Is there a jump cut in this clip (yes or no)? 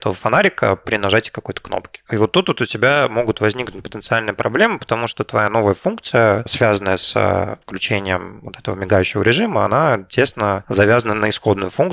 yes